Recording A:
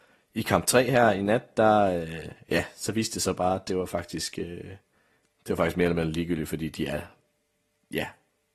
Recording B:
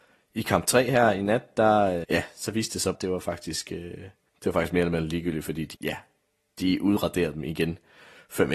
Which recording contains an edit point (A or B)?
B